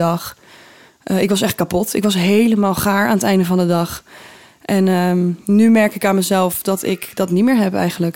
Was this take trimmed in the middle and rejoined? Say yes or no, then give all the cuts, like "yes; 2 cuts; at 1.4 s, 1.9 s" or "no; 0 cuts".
no; 0 cuts